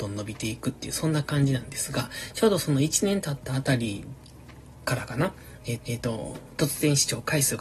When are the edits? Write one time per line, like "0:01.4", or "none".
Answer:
0:05.8